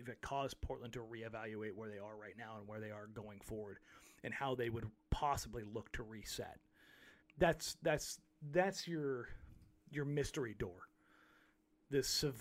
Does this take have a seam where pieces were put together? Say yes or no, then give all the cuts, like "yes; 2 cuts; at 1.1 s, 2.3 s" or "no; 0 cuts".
yes; 1 cut; at 7.2 s